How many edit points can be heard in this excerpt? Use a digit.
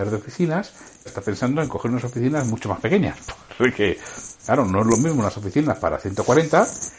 1